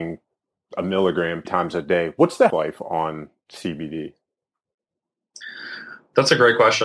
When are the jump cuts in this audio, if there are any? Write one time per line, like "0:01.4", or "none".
0:01.4
0:02.5